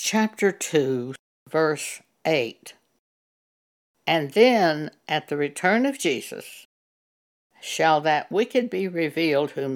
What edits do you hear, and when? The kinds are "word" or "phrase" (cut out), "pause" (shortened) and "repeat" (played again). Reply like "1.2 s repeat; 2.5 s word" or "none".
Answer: none